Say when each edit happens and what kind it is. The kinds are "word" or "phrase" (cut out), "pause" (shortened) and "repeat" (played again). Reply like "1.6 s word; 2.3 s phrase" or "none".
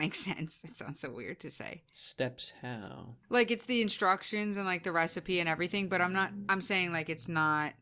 3.2 s pause